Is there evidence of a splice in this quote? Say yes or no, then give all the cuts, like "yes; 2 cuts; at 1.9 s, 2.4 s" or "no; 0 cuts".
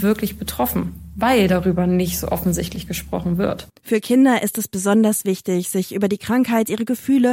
yes; 1 cut; at 3.8 s